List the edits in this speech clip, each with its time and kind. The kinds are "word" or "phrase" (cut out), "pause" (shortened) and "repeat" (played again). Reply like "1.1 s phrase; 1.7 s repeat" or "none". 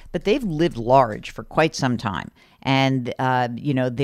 none